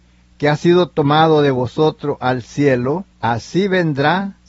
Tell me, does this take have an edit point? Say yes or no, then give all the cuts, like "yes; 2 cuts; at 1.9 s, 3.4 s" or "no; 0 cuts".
yes; 1 cut; at 3.1 s